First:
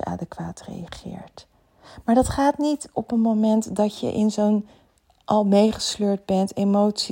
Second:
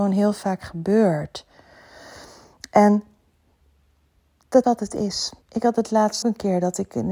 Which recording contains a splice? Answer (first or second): second